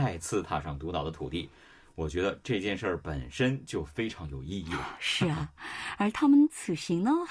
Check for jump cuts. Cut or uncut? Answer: uncut